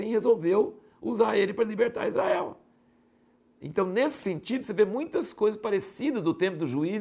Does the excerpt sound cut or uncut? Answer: uncut